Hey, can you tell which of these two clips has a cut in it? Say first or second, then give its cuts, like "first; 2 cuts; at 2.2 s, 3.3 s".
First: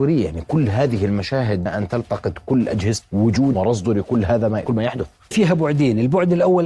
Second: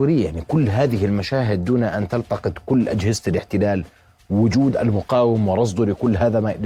first; 5 cuts; at 1.7 s, 3.0 s, 3.5 s, 4.7 s, 5.3 s